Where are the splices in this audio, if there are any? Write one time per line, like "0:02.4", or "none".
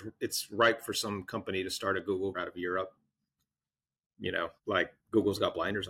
0:02.3
0:04.6